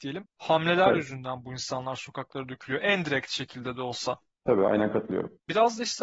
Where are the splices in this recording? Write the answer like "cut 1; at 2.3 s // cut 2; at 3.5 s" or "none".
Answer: none